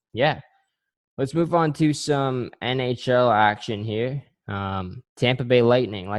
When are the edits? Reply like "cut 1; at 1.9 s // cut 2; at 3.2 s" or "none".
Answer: cut 1; at 5.1 s